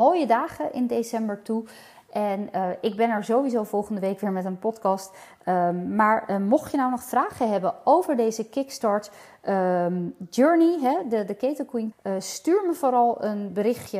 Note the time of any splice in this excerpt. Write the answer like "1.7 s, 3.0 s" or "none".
11.9 s